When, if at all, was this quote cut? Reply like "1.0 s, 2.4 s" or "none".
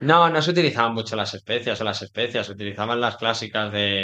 1.8 s